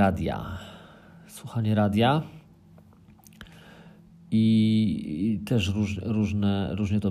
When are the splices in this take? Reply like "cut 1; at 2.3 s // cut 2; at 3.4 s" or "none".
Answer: none